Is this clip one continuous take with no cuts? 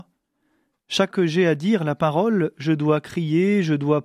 no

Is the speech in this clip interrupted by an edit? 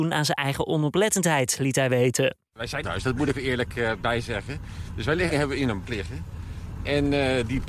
yes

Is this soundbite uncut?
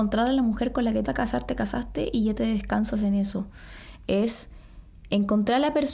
no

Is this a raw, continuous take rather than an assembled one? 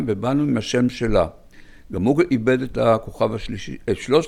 yes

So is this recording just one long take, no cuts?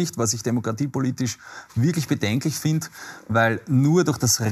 yes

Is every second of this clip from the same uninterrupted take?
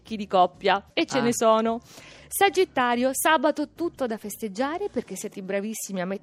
no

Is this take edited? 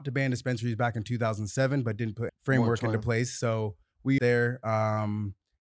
yes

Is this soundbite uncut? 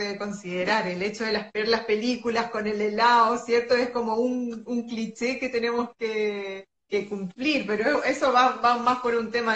no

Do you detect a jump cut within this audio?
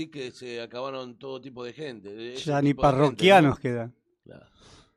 no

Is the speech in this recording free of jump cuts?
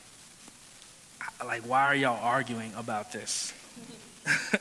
yes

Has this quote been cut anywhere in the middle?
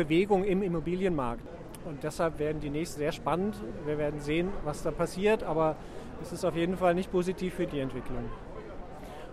yes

